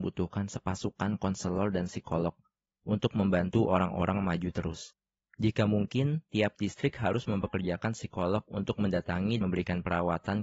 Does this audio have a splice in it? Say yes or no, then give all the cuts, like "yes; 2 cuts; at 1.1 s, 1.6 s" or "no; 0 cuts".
yes; 1 cut; at 9.4 s